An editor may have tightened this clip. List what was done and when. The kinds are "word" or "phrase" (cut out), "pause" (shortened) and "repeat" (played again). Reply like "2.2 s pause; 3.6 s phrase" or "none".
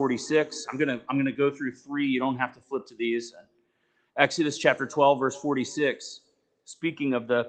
none